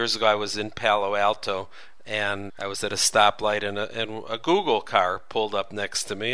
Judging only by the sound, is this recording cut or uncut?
cut